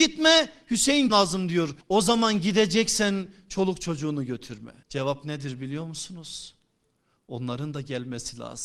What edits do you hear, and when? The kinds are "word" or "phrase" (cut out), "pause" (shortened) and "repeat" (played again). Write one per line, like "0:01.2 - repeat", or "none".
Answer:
0:01.1 - word
0:01.8 - pause
0:04.8 - pause